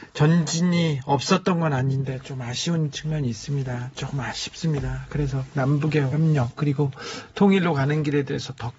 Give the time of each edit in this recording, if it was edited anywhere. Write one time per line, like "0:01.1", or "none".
0:06.1